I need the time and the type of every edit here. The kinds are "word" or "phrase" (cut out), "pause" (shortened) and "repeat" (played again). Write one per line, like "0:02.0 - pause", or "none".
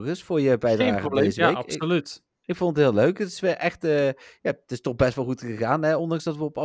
none